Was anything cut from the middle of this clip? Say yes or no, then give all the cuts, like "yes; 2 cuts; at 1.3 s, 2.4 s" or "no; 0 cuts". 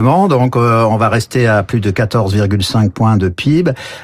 no; 0 cuts